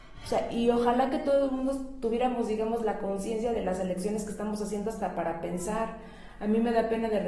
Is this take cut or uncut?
uncut